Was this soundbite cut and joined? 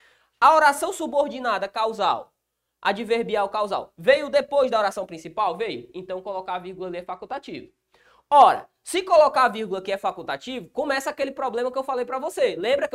no; 0 cuts

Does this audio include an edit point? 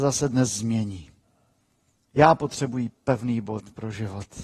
no; 0 cuts

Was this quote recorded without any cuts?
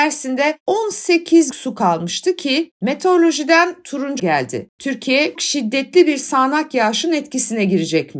no; 3 cuts; at 1.5 s, 4.2 s, 5.4 s

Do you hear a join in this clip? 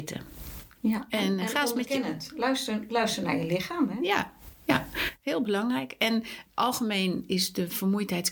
no; 0 cuts

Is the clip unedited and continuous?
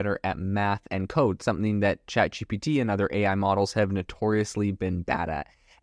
yes; 0 cuts

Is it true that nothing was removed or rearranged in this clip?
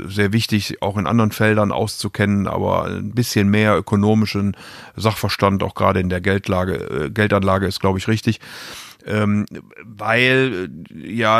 yes; 0 cuts

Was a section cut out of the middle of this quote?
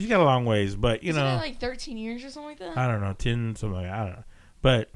no; 0 cuts

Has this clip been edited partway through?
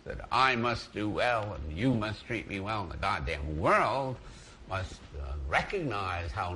no; 0 cuts

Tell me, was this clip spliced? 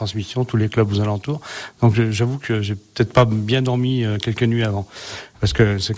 no; 0 cuts

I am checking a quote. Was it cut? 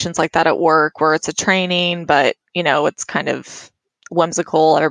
no; 0 cuts

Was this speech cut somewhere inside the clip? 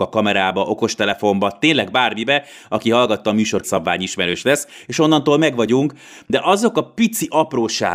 yes; 1 cut; at 3.6 s

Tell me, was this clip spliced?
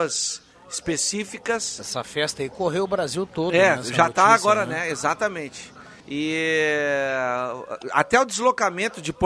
yes; 1 cut; at 6.0 s

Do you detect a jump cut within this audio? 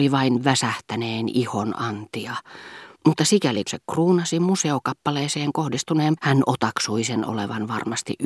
yes; 3 cuts; at 2.9 s, 3.7 s, 6.2 s

